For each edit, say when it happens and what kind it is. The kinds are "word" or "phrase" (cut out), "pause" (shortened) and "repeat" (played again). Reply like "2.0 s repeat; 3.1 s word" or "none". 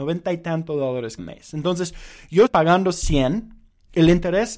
1.2 s word; 2.5 s word

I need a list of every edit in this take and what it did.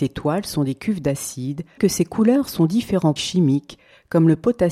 1.8 s word; 3.2 s word

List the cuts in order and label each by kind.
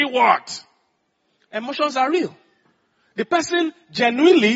none

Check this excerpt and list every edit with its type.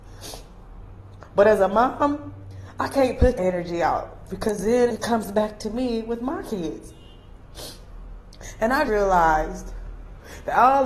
3.4 s word; 4.9 s word; 8.9 s word

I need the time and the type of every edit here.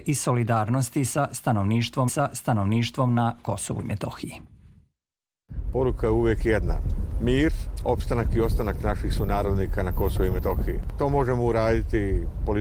2.1 s repeat

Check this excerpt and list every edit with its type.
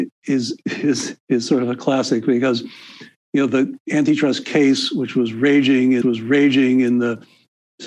6.0 s repeat

